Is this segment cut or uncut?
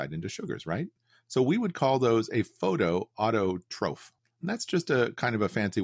uncut